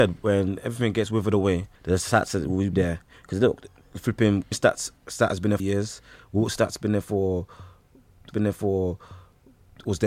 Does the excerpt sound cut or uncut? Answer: cut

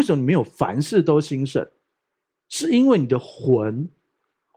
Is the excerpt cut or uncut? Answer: uncut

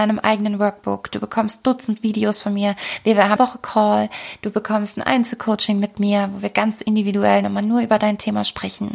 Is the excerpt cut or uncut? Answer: cut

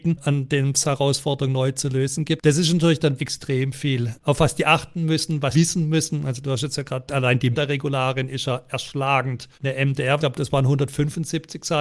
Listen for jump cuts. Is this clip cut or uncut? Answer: cut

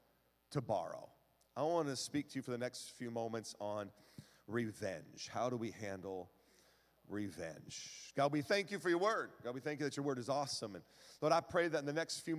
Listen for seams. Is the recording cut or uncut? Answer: uncut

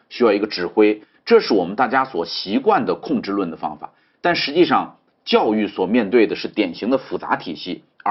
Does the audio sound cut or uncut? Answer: uncut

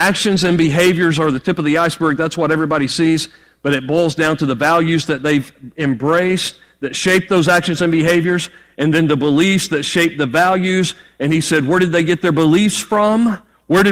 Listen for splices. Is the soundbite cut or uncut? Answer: uncut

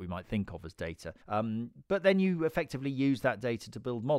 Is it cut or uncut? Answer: cut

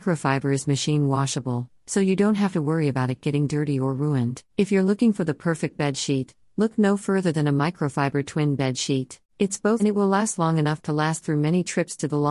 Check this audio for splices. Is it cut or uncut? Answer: cut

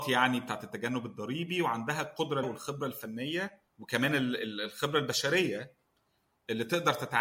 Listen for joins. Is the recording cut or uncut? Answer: cut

